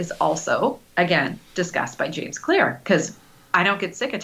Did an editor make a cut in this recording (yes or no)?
no